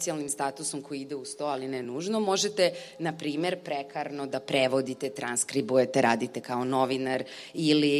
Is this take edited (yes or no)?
no